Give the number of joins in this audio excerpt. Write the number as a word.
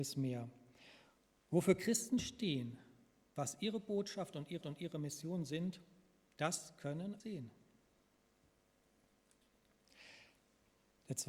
two